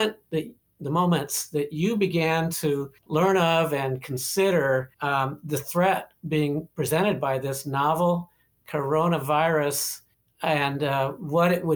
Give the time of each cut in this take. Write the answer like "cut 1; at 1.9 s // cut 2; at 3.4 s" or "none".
cut 1; at 3.0 s // cut 2; at 4.9 s // cut 3; at 10.1 s

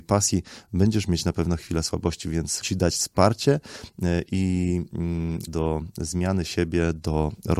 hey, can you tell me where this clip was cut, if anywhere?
cut 1; at 2.6 s // cut 2; at 5.5 s

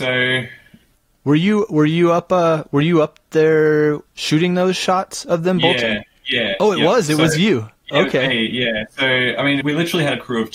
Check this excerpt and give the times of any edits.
cut 1; at 4.1 s // cut 2; at 9.6 s

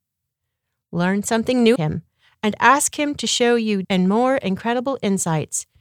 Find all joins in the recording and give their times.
cut 1; at 1.8 s // cut 2; at 3.8 s

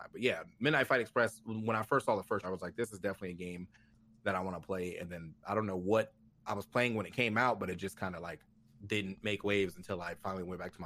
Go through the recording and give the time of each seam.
cut 1; at 2.4 s // cut 2; at 6.3 s // cut 3; at 8.5 s

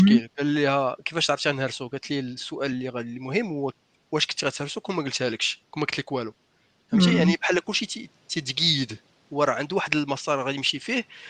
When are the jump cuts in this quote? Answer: none

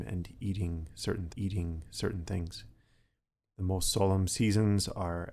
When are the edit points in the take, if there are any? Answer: cut 1; at 1.3 s

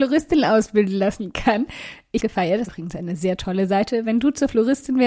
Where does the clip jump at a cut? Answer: cut 1; at 2.2 s // cut 2; at 2.7 s

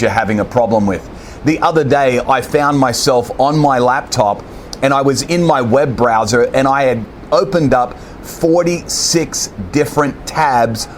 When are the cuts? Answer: none

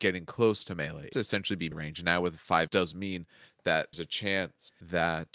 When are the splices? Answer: cut 1; at 1.1 s // cut 2; at 1.7 s // cut 3; at 2.7 s // cut 4; at 3.9 s

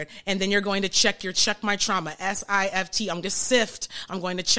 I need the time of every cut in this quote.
cut 1; at 1.3 s // cut 2; at 3.2 s

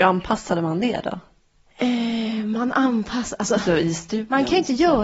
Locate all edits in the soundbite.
none

